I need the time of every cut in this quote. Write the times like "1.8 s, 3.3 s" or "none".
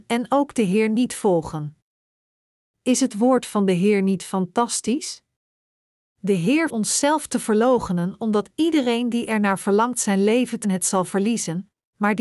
6.7 s, 10.6 s